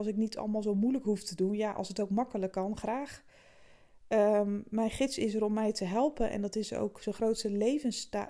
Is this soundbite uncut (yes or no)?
yes